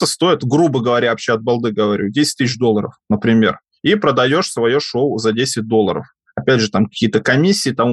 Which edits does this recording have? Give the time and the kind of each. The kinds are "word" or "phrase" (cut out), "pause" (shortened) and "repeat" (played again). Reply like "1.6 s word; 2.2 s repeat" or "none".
none